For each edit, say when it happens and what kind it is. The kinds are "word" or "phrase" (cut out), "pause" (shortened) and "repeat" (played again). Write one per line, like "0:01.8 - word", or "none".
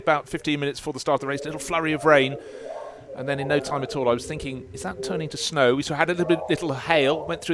none